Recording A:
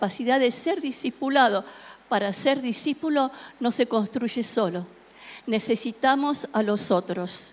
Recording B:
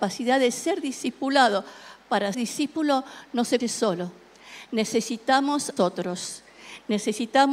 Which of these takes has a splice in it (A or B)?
B